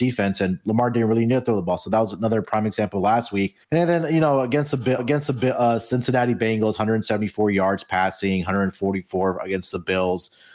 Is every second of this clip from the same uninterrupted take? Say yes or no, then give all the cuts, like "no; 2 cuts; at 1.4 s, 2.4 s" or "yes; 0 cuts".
no; 2 cuts; at 3.6 s, 5.0 s